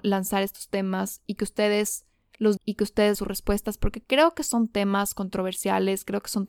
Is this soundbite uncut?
no; 2 cuts; at 2.6 s, 3.1 s

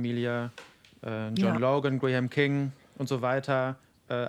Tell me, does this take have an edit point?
no; 0 cuts

